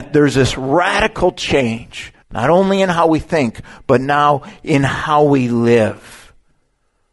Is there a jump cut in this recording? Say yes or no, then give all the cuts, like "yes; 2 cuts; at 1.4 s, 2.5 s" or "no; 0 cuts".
yes; 1 cut; at 2.2 s